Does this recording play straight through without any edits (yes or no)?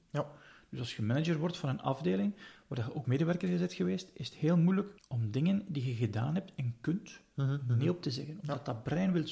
no